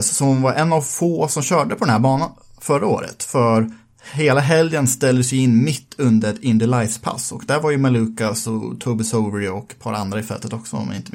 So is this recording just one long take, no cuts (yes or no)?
yes